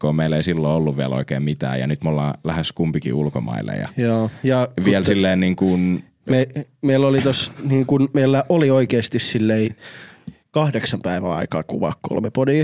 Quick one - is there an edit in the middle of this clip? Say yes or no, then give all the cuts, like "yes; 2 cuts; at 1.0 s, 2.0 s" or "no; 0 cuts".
no; 0 cuts